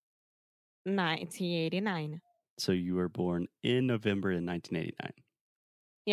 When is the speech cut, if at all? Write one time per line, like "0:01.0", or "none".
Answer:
none